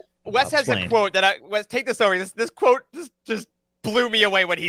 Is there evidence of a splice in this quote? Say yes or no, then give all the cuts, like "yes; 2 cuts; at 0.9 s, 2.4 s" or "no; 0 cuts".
no; 0 cuts